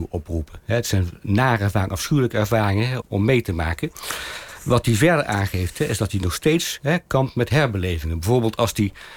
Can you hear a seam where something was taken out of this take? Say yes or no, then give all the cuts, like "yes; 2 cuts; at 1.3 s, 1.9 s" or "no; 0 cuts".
yes; 1 cut; at 3.0 s